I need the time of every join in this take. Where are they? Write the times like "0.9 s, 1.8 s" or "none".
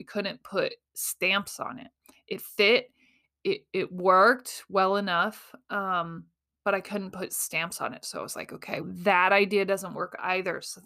8.8 s